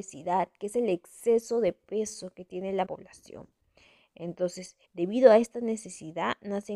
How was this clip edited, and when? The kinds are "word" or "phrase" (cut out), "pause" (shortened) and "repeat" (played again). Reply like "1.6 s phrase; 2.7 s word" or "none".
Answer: 2.8 s phrase; 4.8 s pause

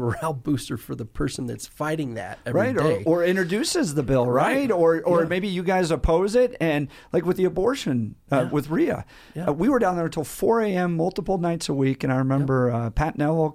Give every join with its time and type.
none

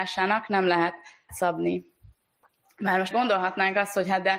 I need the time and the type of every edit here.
1.3 s word; 3.1 s word

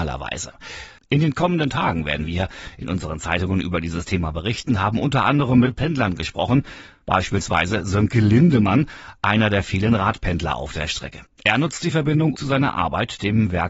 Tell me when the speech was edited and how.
12.3 s word

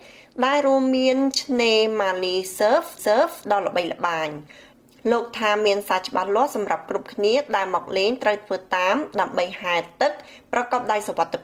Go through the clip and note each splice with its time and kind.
3.0 s repeat

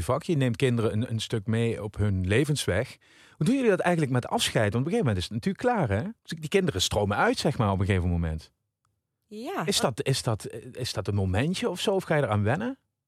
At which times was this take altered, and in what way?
6.2 s pause

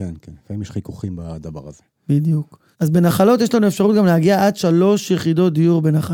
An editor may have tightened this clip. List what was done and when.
2.7 s pause

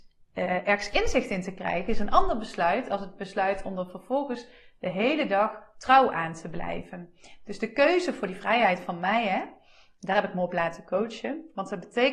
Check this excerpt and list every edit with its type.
none

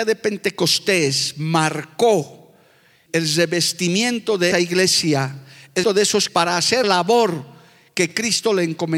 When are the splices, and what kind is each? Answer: 3.1 s word; 4.5 s word; 5.8 s word; 6.3 s word; 6.8 s word

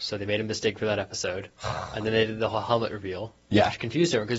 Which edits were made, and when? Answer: none

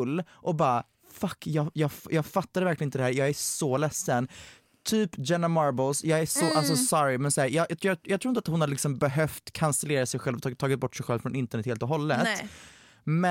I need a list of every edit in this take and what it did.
none

